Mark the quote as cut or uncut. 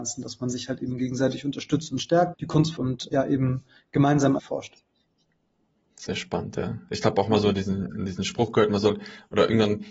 cut